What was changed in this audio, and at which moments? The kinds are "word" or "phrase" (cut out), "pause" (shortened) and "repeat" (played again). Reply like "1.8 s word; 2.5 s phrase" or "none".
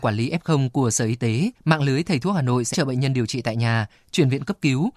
1.6 s pause; 2.7 s word